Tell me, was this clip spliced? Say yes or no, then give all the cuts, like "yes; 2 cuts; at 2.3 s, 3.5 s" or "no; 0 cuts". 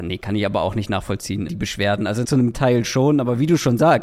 yes; 3 cuts; at 1.5 s, 2.2 s, 2.5 s